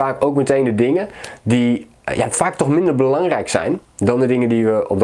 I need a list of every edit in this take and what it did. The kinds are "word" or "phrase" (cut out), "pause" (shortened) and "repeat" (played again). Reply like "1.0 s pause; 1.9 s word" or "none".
none